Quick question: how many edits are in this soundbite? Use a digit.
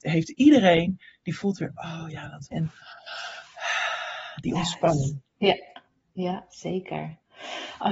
1